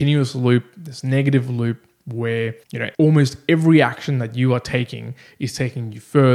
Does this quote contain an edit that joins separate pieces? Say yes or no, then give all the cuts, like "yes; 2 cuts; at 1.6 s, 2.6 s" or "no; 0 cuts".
yes; 2 cuts; at 2.6 s, 2.9 s